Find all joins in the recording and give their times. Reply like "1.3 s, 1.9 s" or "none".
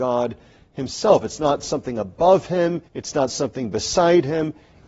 2.8 s